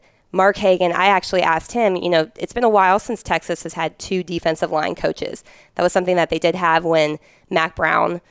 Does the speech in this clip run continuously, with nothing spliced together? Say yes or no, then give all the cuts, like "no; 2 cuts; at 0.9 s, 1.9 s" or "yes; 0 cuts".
yes; 0 cuts